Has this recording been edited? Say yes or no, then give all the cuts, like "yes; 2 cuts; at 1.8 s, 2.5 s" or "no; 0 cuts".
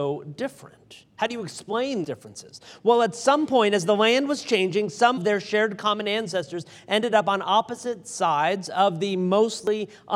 yes; 2 cuts; at 2.0 s, 5.2 s